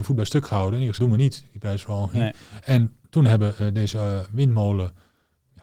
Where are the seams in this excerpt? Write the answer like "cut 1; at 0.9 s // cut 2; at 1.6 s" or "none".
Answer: cut 1; at 1.0 s